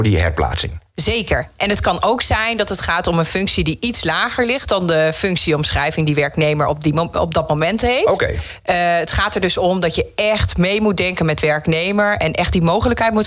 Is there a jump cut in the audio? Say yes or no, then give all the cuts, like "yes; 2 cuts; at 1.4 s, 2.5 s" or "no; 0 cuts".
no; 0 cuts